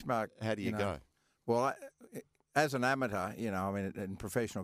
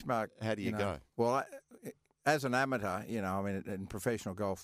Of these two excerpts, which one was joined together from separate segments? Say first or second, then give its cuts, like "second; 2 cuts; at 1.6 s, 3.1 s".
second; 1 cut; at 1.1 s